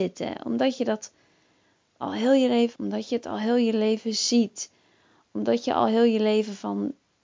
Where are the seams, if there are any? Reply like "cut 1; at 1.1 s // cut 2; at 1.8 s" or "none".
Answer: cut 1; at 2.8 s